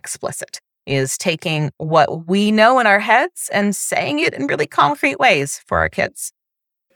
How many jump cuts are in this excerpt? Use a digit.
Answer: 0